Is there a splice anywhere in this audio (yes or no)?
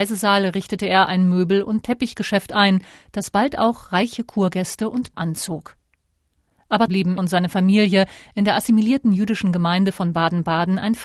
yes